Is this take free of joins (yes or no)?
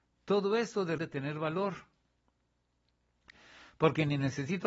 no